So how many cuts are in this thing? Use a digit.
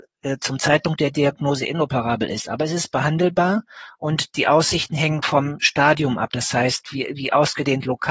0